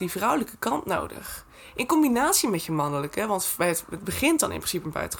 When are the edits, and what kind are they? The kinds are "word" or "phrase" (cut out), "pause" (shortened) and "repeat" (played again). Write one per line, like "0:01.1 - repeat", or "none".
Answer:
none